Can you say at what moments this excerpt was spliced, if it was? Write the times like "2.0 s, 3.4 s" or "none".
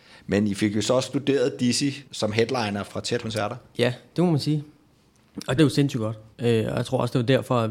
2.1 s, 2.8 s, 3.2 s, 5.6 s, 6.3 s